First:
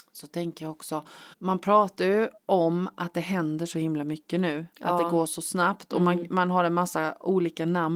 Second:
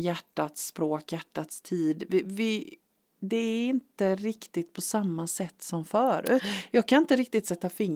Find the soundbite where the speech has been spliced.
first; 2 cuts; at 1.3 s, 2.4 s

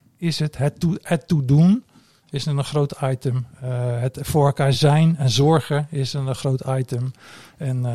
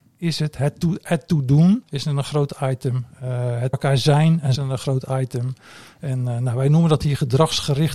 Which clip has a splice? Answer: second; 3 cuts; at 1.8 s, 3.7 s, 4.6 s

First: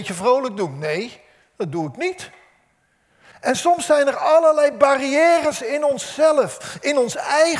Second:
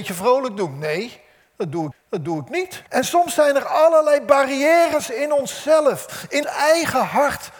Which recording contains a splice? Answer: second; 3 cuts; at 1.9 s, 2.9 s, 6.4 s

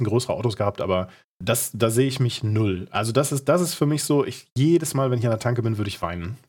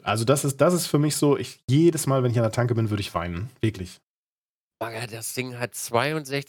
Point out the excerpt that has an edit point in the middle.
first; 1 cut; at 1.2 s

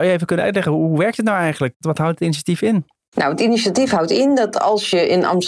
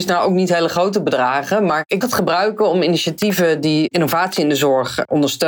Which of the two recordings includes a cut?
second; 1 cut; at 2.0 s

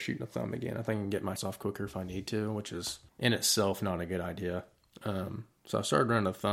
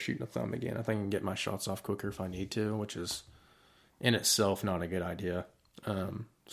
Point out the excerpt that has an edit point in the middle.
first; 2 cuts; at 1.4 s, 3.1 s

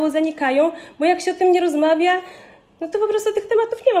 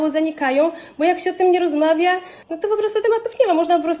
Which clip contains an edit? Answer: second; 2 cuts; at 2.4 s, 3.0 s

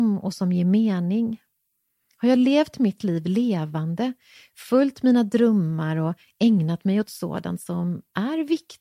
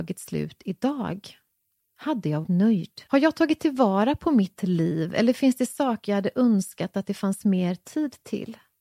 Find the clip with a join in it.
second; 2 cuts; at 2.4 s, 3.1 s

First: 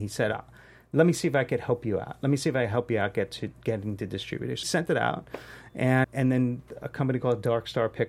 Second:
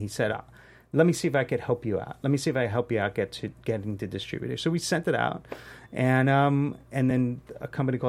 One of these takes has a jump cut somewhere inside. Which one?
first; 2 cuts; at 4.6 s, 6.0 s

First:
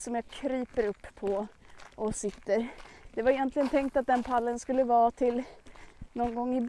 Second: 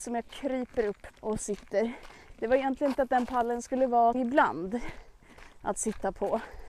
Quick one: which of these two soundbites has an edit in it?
second; 3 cuts; at 1.1 s, 2.9 s, 4.1 s

